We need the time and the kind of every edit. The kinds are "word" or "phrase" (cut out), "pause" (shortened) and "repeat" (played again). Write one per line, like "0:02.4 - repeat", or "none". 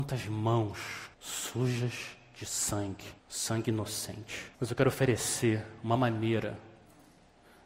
0:01.1 - pause
0:03.2 - pause
0:04.5 - pause